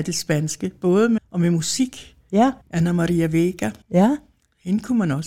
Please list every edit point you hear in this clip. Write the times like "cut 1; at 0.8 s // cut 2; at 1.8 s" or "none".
cut 1; at 1.2 s // cut 2; at 2.6 s // cut 3; at 3.8 s

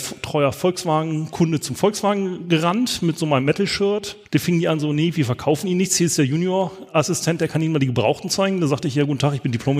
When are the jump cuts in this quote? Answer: cut 1; at 4.2 s

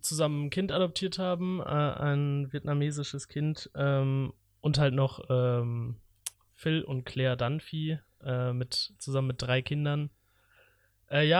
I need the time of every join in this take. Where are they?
none

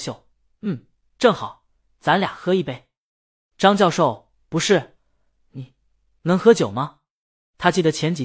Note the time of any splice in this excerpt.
cut 1; at 1.1 s

